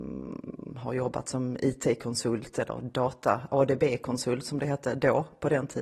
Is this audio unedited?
yes; 0 cuts

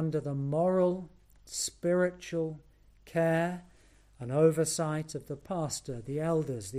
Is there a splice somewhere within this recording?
no; 0 cuts

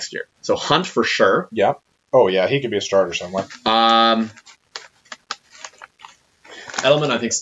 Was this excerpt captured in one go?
yes; 0 cuts

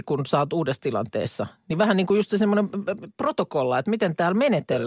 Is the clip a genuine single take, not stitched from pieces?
yes; 0 cuts

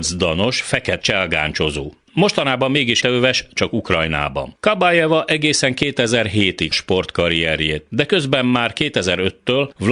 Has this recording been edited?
yes; 5 cuts; at 1.0 s, 3.0 s, 3.6 s, 4.6 s, 6.7 s

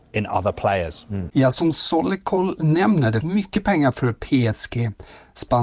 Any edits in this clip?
yes; 1 cut; at 3.2 s

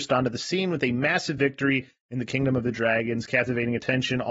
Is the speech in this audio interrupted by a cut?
no; 0 cuts

